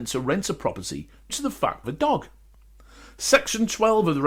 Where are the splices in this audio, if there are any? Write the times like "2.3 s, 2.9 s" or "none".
1.3 s, 1.8 s